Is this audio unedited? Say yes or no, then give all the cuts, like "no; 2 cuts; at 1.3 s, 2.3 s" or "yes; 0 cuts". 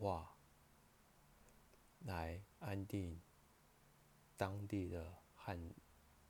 no; 1 cut; at 2.5 s